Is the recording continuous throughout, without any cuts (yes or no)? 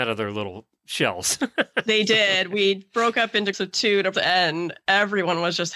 no